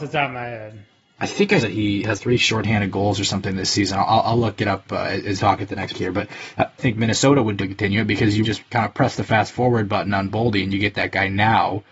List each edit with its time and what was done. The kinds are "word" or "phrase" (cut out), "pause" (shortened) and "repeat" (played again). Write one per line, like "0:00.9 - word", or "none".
0:01.6 - word
0:02.2 - word
0:05.4 - word
0:05.9 - word
0:06.8 - phrase
0:07.6 - word
0:08.4 - word

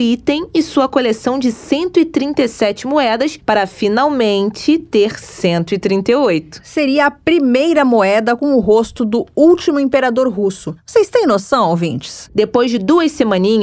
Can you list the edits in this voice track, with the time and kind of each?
none

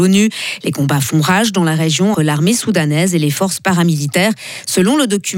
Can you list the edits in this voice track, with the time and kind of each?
0:02.1 - word

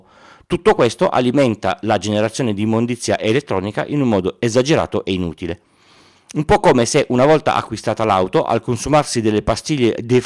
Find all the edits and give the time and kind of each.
none

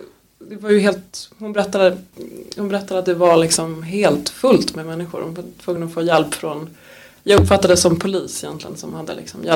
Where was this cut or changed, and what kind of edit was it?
none

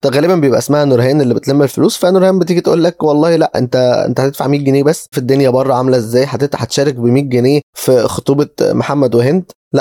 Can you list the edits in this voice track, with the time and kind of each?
0:05.1 - phrase

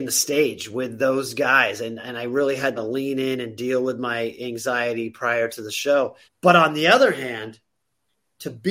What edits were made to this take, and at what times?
0:02.8 - phrase
0:06.2 - pause

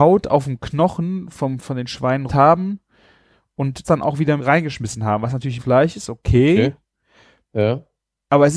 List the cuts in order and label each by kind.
0:01.6 - word
0:02.3 - word
0:03.8 - word
0:04.4 - word
0:05.6 - word

